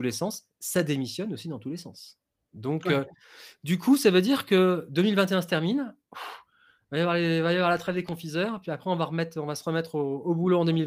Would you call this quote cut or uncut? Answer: uncut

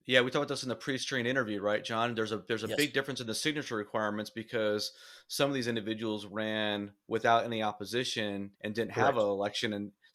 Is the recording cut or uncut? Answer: cut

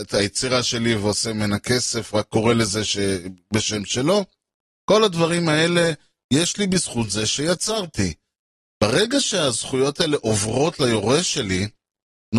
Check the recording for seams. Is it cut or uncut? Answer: uncut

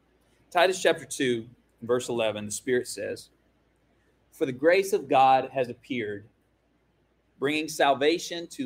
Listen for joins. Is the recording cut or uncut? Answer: uncut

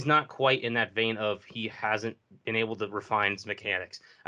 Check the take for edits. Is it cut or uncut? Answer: uncut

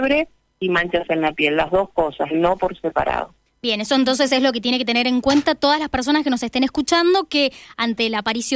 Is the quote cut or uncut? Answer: uncut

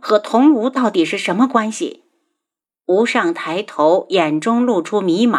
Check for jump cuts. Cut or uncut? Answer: uncut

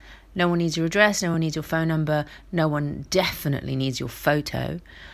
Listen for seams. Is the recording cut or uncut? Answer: uncut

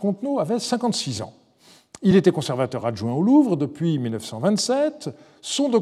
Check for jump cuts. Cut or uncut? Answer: uncut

